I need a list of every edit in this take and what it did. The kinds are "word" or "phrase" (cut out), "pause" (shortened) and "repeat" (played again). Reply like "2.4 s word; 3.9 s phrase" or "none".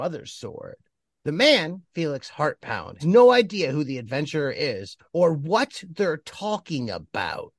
3.0 s word; 5.0 s pause

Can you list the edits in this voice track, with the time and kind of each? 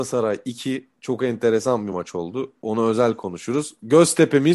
none

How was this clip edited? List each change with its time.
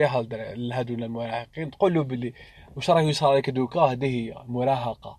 none

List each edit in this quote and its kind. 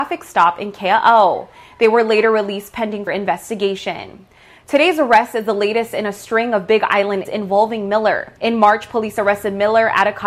3.1 s word; 7.2 s word; 8.4 s pause

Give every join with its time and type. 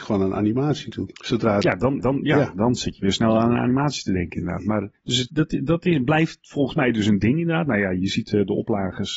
1.1 s pause; 2.0 s repeat; 4.9 s pause; 5.3 s phrase

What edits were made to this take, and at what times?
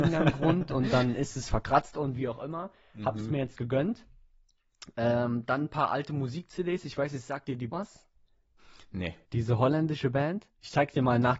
7.7 s phrase; 9.2 s pause

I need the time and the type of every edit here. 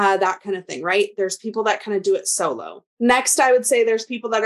2.9 s pause

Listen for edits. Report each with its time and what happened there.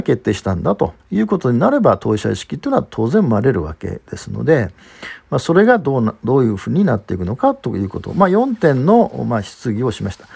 1.0 s pause

